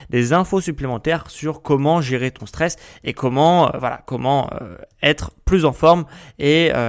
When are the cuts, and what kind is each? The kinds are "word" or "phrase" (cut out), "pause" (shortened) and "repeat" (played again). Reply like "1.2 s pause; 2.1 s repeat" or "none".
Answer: none

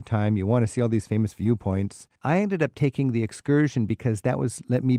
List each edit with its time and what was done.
2.1 s pause

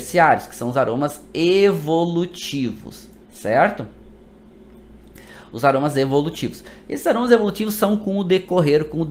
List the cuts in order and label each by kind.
3.2 s pause

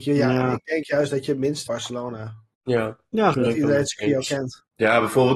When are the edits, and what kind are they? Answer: 1.7 s phrase; 3.3 s word

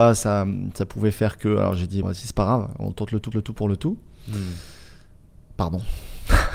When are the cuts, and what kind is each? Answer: 2.0 s word; 3.3 s repeat

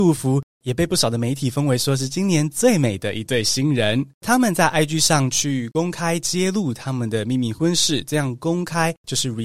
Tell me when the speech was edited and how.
4.1 s pause

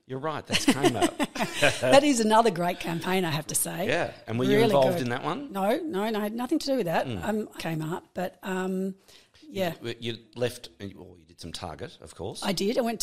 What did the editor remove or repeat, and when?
7.6 s phrase

